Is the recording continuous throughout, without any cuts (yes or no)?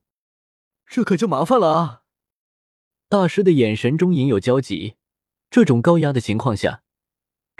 yes